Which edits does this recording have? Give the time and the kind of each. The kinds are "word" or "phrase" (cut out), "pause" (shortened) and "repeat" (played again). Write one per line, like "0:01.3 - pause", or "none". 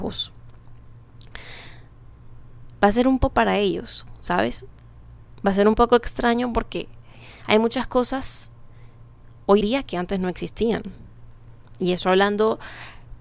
0:03.3 - word
0:09.6 - word

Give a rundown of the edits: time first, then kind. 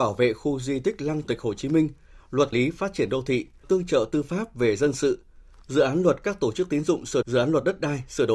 0:01.2 - word
0:02.5 - word
0:03.6 - word
0:07.2 - word

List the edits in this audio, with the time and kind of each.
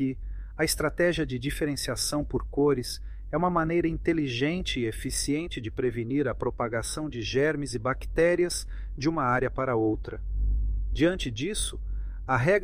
none

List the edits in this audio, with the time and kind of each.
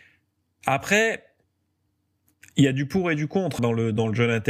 0:03.6 - word

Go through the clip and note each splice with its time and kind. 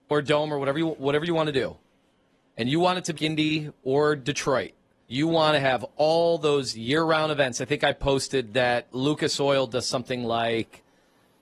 0:03.2 - word
0:05.1 - word

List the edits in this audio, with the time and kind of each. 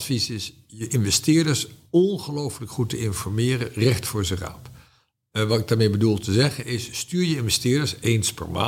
none

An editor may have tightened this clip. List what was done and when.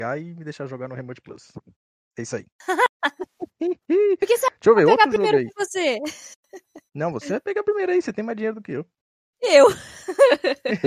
0:06.9 - pause

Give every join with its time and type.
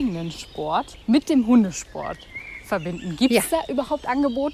0:01.0 - pause

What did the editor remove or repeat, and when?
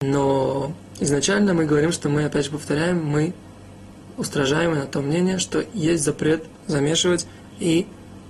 none

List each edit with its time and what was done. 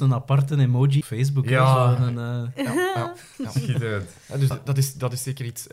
0:01.0 - phrase
0:03.3 - pause
0:04.5 - word

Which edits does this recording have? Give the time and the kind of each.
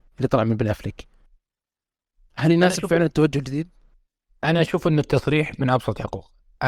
none

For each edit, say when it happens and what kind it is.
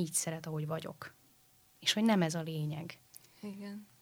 none

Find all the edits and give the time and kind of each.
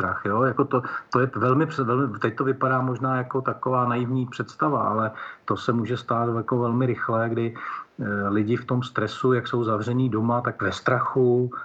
0:10.6 - phrase

